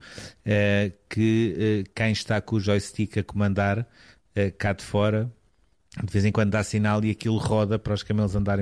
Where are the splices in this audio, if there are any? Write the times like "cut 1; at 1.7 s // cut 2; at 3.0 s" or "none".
none

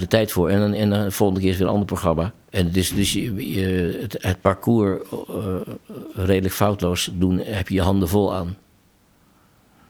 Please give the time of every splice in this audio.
cut 1; at 2.4 s

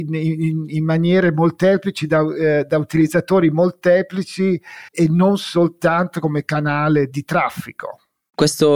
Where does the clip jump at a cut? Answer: cut 1; at 4.9 s

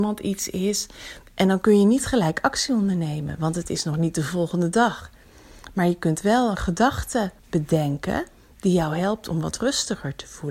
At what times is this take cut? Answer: cut 1; at 7.4 s

